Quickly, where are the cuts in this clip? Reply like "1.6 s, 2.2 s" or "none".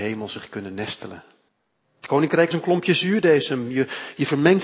1.5 s, 2.5 s